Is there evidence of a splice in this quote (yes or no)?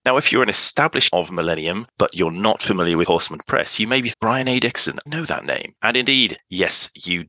yes